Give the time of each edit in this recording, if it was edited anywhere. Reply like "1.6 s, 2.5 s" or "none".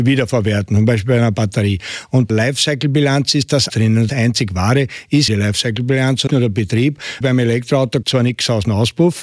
2.3 s, 3.7 s, 4.1 s, 5.3 s, 6.3 s, 7.2 s, 8.0 s